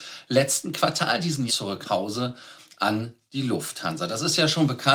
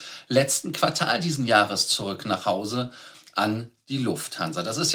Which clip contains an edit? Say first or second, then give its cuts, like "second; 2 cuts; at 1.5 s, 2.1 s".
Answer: first; 2 cuts; at 1.5 s, 1.8 s